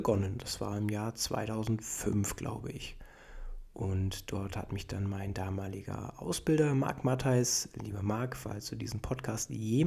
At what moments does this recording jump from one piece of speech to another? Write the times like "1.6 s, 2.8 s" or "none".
none